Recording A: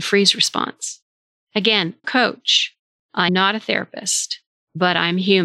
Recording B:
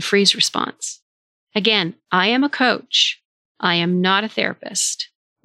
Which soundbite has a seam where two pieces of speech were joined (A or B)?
A